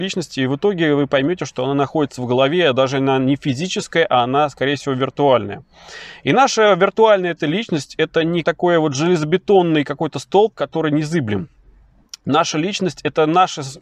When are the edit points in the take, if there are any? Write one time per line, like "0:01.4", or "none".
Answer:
0:08.4

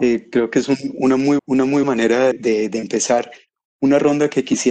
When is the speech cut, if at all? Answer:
0:01.4
0:01.8
0:02.3

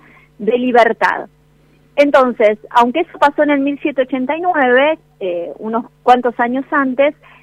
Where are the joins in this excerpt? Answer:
none

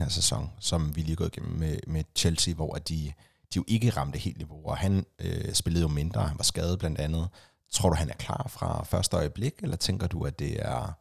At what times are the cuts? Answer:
none

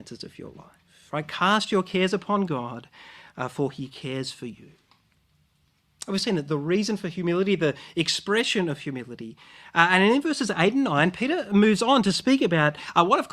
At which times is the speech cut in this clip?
none

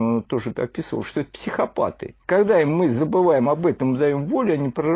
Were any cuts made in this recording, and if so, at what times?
0:02.2

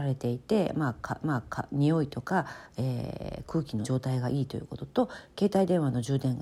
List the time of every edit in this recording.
0:01.2
0:03.8

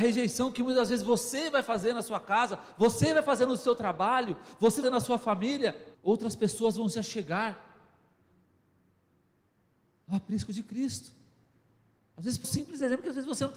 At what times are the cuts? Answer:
0:04.8
0:05.9
0:12.4

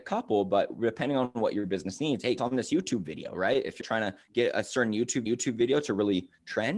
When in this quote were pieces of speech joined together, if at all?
0:02.4
0:03.8
0:05.3

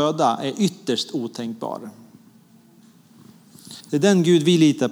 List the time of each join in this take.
0:03.8

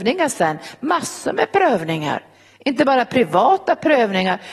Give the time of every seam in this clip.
none

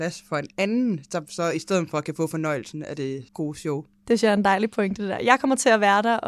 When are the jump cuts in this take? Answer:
0:03.3

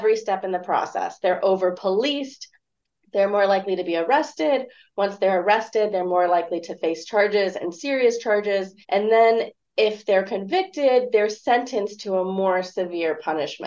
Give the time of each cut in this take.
0:08.8

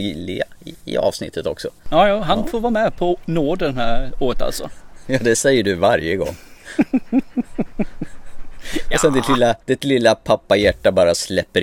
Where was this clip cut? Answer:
0:01.8
0:09.6

